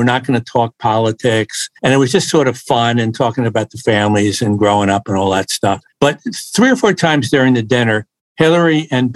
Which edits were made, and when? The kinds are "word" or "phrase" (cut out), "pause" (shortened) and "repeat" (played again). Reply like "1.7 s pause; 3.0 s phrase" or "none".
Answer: none